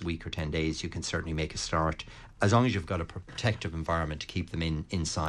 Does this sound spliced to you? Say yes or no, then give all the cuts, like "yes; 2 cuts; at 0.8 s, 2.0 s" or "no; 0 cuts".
no; 0 cuts